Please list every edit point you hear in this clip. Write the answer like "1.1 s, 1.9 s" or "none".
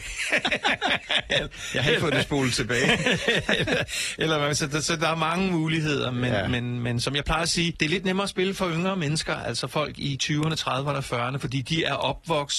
none